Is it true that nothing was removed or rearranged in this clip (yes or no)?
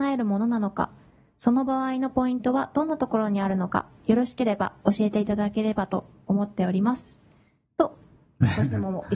yes